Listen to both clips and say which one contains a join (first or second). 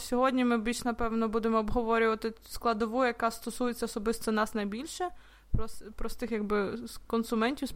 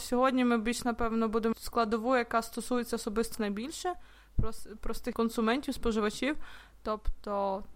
second